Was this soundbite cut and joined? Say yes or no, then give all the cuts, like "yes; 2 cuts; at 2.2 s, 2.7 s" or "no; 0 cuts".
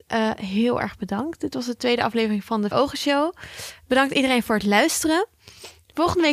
yes; 1 cut; at 2.7 s